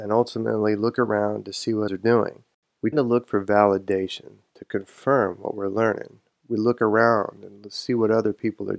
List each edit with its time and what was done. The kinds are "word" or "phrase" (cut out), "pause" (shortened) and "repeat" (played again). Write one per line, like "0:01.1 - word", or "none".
0:01.9 - word
0:02.9 - word

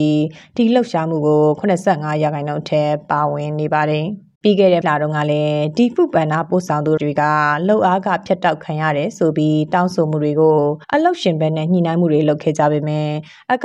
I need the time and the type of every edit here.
0:04.3 - pause
0:04.8 - word
0:07.0 - word
0:10.8 - pause

